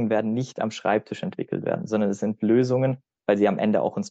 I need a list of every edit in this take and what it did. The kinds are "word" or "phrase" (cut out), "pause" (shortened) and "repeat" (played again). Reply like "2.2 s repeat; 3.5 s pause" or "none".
none